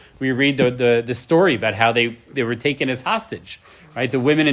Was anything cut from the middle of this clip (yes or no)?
no